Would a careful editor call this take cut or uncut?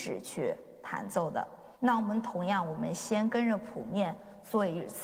cut